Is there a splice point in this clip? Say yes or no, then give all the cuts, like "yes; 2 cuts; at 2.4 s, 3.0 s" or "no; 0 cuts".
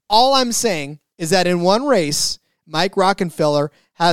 no; 0 cuts